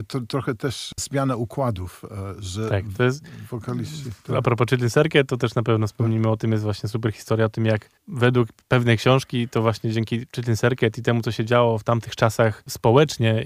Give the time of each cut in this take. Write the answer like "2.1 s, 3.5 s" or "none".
8.0 s